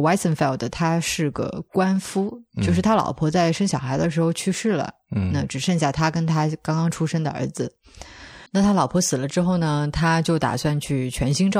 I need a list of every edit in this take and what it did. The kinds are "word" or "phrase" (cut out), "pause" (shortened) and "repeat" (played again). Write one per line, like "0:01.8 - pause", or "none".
0:08.5 - pause